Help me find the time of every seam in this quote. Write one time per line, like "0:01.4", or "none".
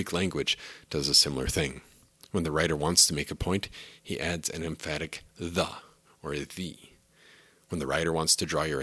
none